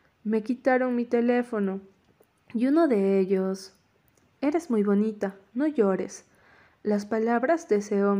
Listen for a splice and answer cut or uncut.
uncut